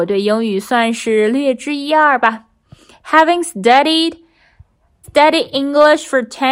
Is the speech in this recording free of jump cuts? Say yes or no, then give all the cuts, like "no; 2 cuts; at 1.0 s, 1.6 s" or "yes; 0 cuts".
no; 1 cut; at 5.0 s